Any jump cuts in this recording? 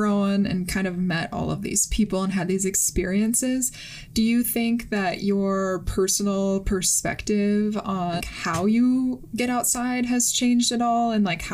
yes; 1 cut; at 8.2 s

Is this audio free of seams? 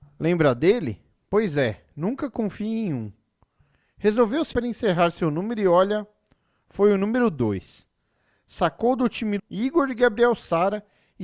no; 2 cuts; at 4.5 s, 9.4 s

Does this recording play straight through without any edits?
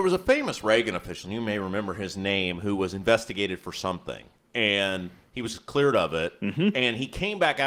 yes; 0 cuts

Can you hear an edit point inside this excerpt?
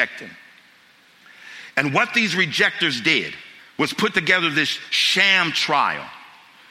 yes; 1 cut; at 3.6 s

